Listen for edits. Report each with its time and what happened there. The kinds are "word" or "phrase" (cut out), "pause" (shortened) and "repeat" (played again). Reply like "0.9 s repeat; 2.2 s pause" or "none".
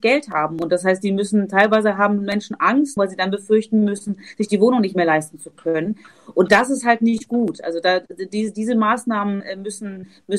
3.0 s phrase